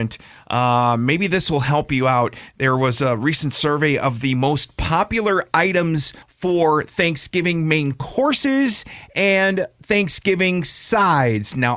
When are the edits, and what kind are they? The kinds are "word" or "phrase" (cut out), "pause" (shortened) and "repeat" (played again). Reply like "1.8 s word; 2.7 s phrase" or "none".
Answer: 6.2 s pause